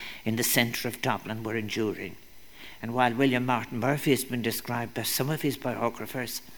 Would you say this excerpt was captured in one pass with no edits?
yes; 0 cuts

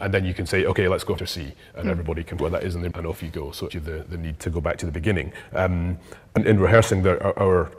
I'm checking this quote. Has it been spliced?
yes; 6 cuts; at 1.2 s, 2.4 s, 2.9 s, 3.7 s, 4.4 s, 6.4 s

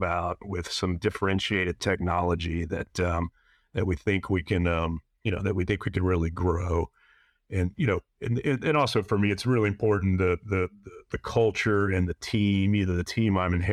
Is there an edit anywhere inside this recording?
no; 0 cuts

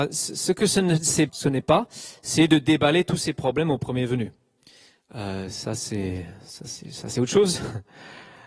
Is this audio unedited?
no; 1 cut; at 1.3 s

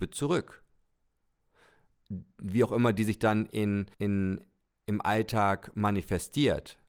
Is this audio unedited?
no; 1 cut; at 3.9 s

